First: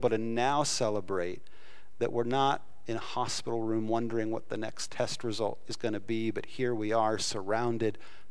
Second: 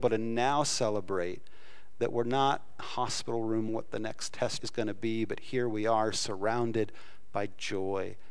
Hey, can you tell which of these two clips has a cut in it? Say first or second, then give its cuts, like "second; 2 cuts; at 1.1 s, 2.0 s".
second; 3 cuts; at 2.8 s, 3.7 s, 4.6 s